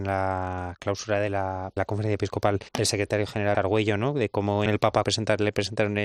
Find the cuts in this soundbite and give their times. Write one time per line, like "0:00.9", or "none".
0:01.8
0:02.7
0:03.5
0:04.7
0:05.0